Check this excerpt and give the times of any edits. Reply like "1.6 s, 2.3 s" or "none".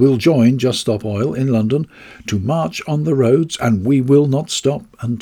none